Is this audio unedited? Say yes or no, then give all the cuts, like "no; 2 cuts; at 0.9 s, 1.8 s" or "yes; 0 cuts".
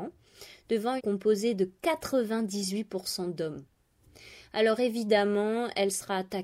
no; 1 cut; at 1.0 s